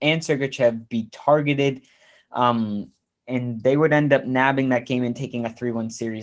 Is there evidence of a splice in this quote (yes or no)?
no